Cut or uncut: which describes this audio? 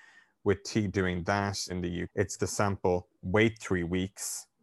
cut